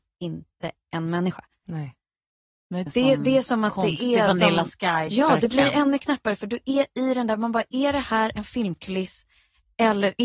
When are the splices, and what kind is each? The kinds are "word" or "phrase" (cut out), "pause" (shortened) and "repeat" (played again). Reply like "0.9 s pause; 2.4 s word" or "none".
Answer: 2.9 s word; 5.1 s word